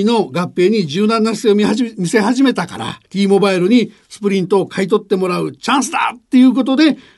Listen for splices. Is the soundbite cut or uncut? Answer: cut